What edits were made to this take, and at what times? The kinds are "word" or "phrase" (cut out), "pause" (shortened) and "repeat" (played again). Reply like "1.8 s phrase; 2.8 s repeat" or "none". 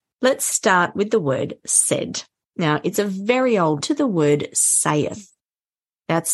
3.8 s phrase